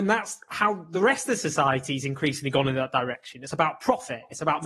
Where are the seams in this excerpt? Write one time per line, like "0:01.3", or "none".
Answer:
none